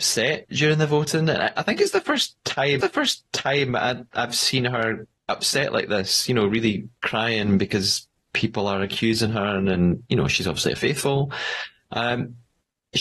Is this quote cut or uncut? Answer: cut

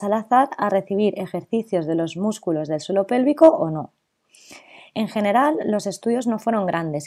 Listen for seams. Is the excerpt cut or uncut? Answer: uncut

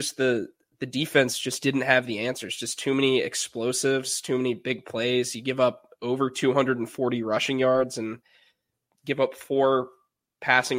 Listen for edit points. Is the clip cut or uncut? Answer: uncut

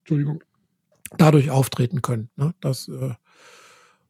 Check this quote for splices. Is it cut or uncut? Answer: uncut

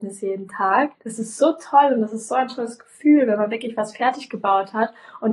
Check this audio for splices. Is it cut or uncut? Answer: cut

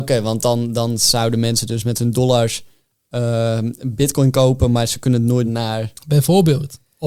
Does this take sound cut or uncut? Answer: cut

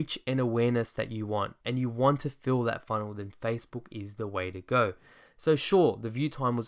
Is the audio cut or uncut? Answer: cut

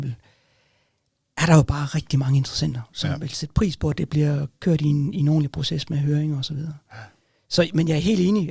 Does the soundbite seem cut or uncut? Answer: uncut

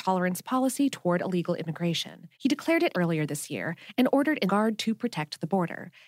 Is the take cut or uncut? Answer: cut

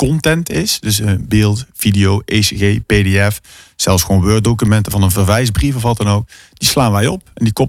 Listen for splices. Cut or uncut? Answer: uncut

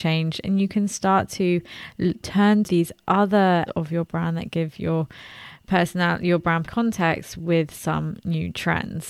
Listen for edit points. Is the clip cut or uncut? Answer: cut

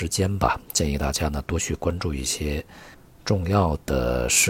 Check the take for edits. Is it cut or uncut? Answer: uncut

